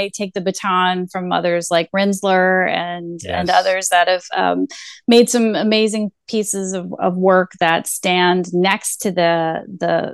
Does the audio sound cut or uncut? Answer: uncut